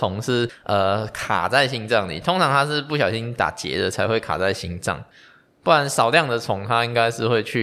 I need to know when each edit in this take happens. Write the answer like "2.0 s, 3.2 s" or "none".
none